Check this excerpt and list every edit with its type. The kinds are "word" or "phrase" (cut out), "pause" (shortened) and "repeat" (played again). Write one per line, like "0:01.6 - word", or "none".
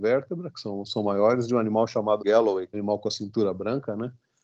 0:02.2 - word
0:02.7 - phrase